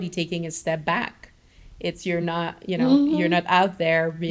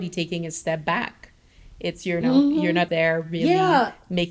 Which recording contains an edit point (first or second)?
second